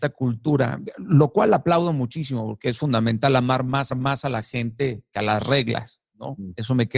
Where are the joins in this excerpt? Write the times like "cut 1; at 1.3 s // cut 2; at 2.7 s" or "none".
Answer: cut 1; at 3.9 s